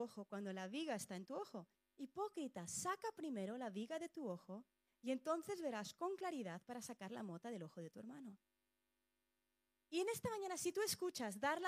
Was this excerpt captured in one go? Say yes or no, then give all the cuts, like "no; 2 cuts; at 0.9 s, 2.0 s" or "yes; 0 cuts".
yes; 0 cuts